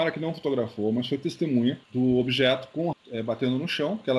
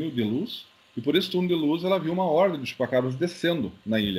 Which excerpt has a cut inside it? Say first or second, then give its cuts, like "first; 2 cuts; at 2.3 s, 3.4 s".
first; 2 cuts; at 1.8 s, 2.9 s